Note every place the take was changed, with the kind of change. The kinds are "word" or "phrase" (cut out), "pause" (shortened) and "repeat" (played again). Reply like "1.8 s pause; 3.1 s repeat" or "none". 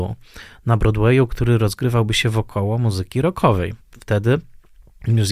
3.8 s pause